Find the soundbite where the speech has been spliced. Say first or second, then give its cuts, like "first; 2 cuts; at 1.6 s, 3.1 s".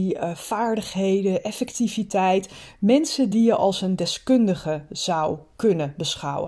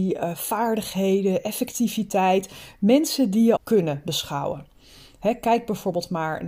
second; 1 cut; at 3.6 s